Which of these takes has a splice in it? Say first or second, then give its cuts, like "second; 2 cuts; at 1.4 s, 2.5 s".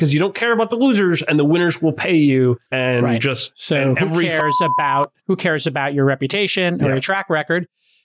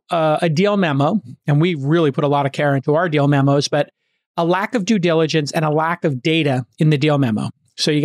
first; 2 cuts; at 2.6 s, 5.2 s